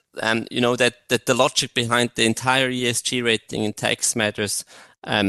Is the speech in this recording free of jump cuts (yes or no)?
yes